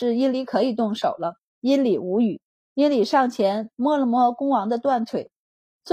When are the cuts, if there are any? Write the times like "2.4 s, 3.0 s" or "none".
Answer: 1.4 s, 2.5 s